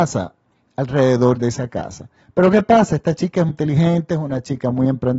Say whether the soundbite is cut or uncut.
cut